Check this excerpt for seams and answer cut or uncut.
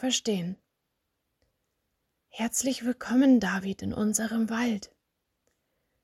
uncut